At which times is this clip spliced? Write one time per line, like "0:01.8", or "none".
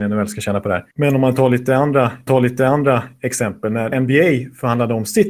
0:00.9
0:02.3
0:03.9